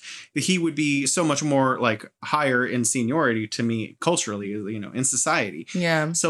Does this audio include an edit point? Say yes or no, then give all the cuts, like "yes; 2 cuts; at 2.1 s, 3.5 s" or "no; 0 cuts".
no; 0 cuts